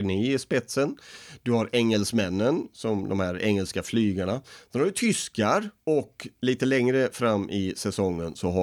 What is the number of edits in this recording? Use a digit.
1